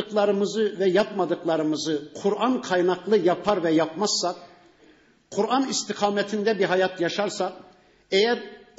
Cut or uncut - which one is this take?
uncut